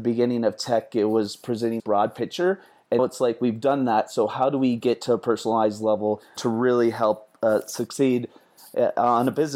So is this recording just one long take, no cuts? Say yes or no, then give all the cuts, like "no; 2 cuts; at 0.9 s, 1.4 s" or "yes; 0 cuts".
no; 3 cuts; at 1.8 s, 3.0 s, 6.4 s